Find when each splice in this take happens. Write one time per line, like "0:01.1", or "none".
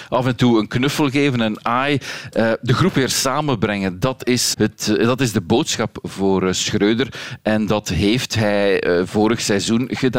0:04.5